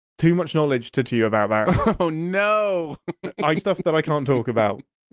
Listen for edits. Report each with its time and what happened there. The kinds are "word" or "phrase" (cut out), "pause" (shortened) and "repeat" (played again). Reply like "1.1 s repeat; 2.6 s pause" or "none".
1.1 s word; 3.6 s word